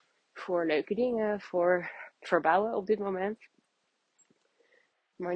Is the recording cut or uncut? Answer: cut